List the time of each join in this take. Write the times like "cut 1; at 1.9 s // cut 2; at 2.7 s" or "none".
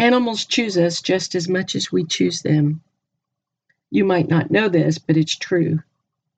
none